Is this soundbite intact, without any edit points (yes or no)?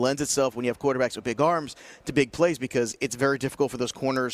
yes